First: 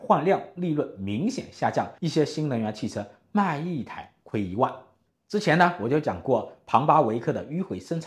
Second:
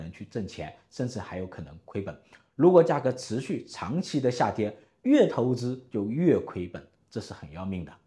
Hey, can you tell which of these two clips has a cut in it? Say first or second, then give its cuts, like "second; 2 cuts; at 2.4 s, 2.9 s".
first; 1 cut; at 2.0 s